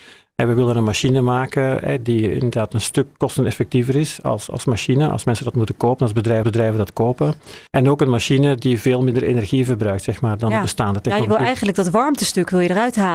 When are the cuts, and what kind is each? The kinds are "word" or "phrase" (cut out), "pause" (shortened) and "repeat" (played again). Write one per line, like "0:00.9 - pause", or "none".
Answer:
0:06.4 - repeat
0:07.7 - pause